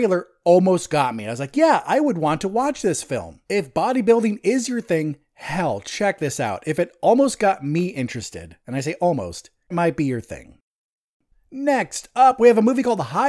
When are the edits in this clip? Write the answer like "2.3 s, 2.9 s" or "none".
3.5 s, 8.6 s, 9.7 s